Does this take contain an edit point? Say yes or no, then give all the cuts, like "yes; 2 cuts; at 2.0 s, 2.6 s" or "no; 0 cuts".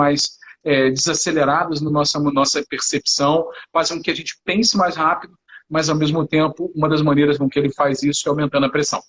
no; 0 cuts